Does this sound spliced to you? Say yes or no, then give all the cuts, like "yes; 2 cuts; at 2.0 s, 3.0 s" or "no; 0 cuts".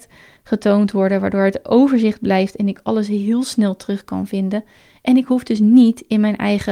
no; 0 cuts